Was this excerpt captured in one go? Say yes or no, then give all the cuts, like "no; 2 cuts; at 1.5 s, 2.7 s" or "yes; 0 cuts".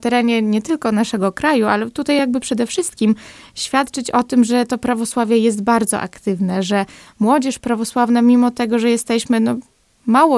yes; 0 cuts